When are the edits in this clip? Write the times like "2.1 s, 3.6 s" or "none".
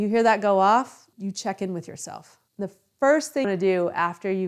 1.1 s, 2.5 s, 3.4 s